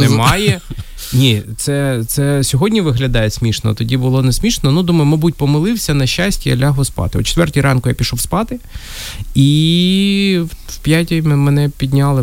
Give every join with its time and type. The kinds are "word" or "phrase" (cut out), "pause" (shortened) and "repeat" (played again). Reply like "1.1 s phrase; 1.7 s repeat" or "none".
none